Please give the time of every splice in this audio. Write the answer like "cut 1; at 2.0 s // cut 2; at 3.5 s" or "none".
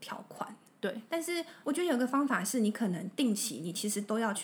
cut 1; at 1.1 s // cut 2; at 1.6 s